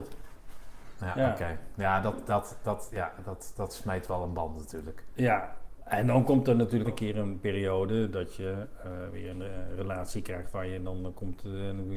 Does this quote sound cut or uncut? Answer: cut